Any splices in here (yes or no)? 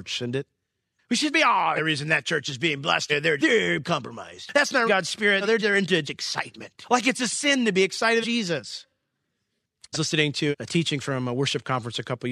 yes